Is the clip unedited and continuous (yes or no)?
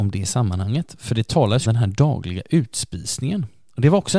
no